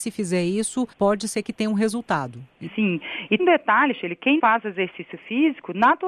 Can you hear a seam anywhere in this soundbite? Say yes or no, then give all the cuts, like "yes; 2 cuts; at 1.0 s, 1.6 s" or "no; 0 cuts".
yes; 3 cuts; at 0.9 s, 3.4 s, 4.4 s